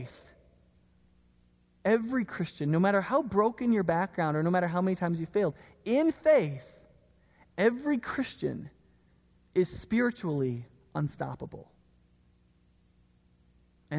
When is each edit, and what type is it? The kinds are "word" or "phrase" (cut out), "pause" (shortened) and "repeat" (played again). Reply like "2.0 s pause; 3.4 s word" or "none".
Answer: none